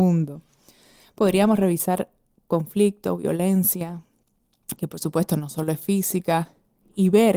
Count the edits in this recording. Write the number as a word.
zero